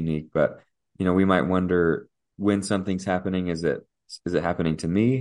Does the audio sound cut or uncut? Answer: uncut